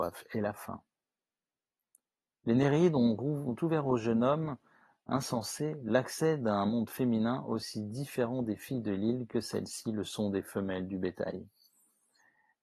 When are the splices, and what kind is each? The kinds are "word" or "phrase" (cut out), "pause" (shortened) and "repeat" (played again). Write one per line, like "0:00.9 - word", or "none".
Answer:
none